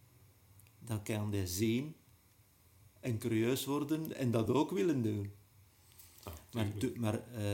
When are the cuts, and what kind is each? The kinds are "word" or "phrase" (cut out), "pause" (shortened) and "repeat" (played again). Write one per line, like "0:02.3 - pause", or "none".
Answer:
none